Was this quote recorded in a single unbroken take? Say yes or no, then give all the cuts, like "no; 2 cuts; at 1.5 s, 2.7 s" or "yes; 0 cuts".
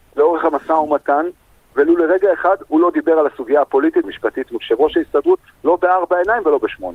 no; 1 cut; at 4.0 s